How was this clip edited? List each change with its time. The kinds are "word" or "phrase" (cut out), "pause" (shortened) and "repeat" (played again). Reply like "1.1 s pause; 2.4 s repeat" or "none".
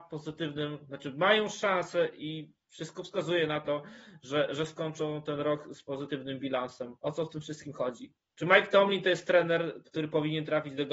7.0 s pause; 8.2 s pause